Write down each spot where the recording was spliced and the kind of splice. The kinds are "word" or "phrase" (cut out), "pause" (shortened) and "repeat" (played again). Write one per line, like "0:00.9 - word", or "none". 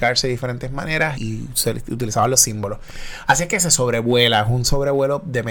0:01.1 - word